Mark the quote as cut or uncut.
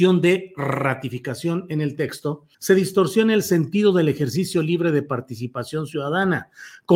cut